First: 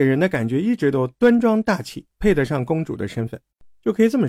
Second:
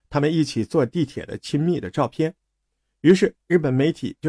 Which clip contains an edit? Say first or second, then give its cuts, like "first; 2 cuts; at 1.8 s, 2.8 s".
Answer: first; 1 cut; at 2.1 s